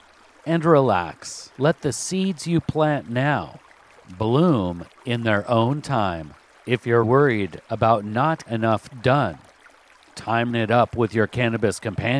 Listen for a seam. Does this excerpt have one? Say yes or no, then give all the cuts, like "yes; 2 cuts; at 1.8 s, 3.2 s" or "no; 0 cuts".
yes; 5 cuts; at 1.5 s, 6.6 s, 7.0 s, 8.5 s, 10.5 s